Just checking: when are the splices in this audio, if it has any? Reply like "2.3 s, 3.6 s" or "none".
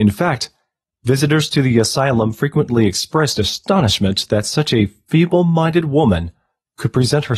none

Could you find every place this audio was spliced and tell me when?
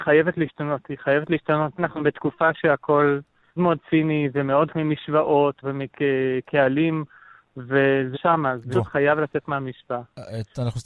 1.8 s, 3.6 s, 4.7 s, 5.6 s, 8.1 s, 8.7 s

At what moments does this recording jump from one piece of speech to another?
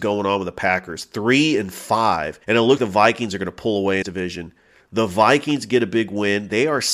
2.4 s, 2.8 s, 4.0 s

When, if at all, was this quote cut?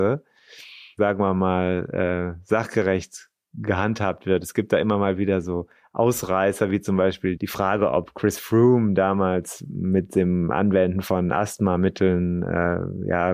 none

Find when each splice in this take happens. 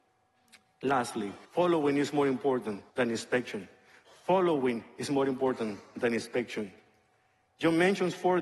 1.4 s, 2.9 s

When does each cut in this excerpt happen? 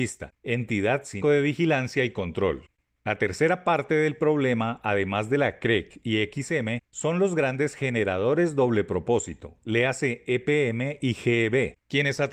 1.2 s

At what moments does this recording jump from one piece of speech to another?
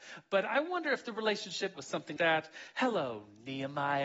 1.8 s, 2.2 s

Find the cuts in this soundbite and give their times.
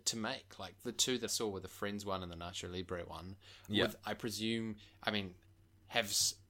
1.3 s

